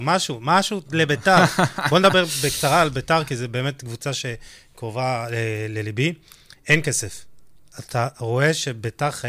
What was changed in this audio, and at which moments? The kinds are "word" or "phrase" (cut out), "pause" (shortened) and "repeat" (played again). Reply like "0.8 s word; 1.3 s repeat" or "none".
7.7 s phrase

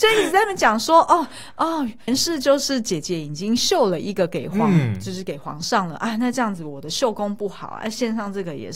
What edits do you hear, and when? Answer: 2.1 s word

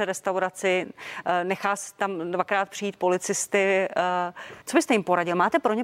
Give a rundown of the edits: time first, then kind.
4.6 s pause

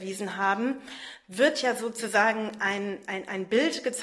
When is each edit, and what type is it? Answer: none

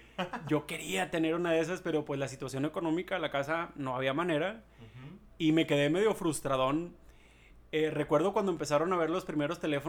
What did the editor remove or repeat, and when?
none

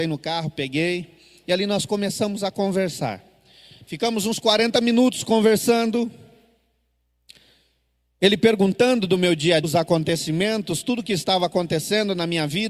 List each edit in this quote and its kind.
9.6 s word

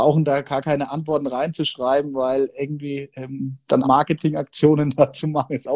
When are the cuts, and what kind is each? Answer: 3.8 s word

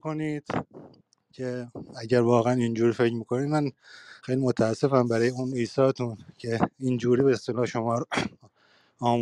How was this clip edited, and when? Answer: 4.2 s pause

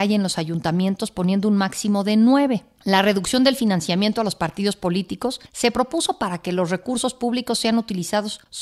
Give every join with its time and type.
none

